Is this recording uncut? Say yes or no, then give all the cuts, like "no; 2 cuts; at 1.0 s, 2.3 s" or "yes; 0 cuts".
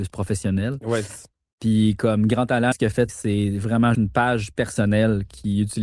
no; 3 cuts; at 2.7 s, 3.1 s, 3.9 s